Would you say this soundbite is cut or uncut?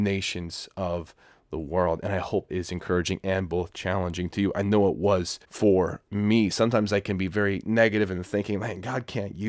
cut